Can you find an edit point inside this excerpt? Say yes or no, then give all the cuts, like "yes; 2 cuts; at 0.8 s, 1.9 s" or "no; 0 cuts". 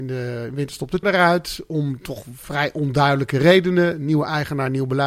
yes; 1 cut; at 1.0 s